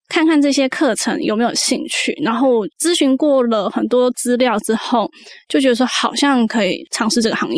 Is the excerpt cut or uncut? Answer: cut